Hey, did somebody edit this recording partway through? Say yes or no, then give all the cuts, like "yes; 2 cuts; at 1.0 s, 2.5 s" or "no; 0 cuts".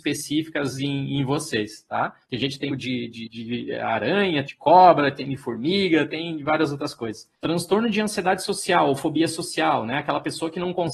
yes; 4 cuts; at 2.2 s, 2.7 s, 4.5 s, 7.4 s